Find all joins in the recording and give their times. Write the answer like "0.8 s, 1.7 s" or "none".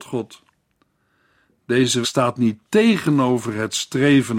2.0 s